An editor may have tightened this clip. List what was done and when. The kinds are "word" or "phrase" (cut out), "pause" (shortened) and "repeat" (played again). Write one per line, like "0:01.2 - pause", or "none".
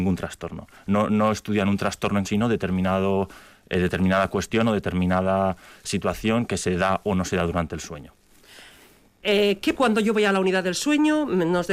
0:02.2 - word
0:09.7 - word